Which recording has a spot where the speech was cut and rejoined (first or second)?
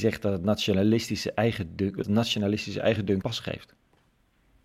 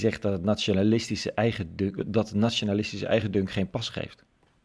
first